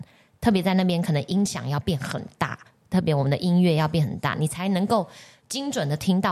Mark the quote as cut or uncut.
uncut